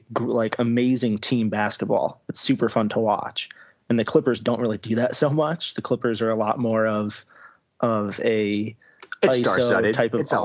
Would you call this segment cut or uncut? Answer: uncut